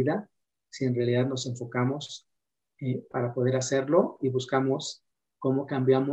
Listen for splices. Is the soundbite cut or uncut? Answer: uncut